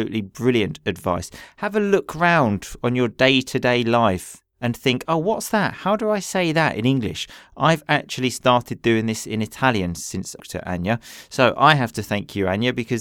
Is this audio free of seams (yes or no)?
no